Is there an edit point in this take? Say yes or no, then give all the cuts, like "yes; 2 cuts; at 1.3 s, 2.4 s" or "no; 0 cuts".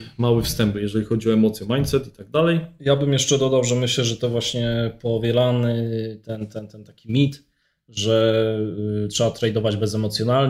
no; 0 cuts